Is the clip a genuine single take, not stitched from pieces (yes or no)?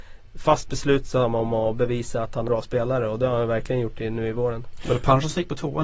no